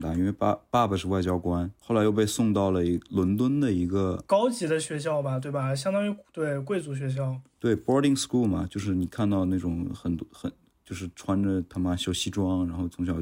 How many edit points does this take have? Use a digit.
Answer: 0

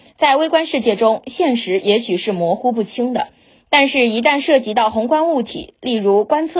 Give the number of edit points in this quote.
0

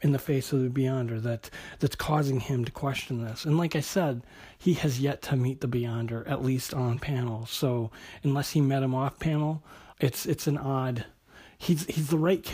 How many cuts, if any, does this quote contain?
1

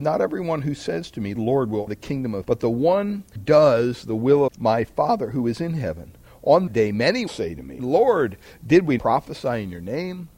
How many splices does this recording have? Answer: 9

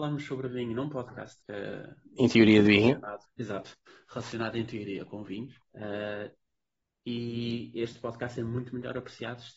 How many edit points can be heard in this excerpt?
3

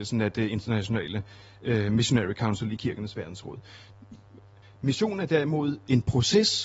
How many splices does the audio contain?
0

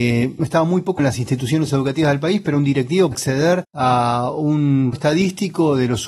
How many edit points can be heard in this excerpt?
3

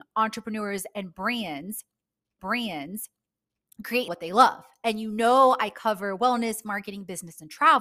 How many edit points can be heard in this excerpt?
2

